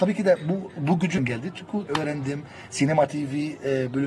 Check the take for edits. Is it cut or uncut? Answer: cut